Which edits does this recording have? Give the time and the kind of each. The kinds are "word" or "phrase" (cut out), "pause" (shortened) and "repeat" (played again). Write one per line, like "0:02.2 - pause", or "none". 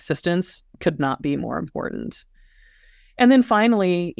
none